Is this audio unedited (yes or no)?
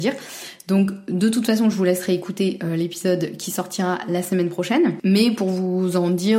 yes